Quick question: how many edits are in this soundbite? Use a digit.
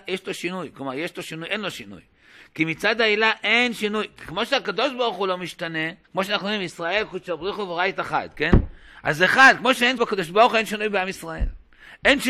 2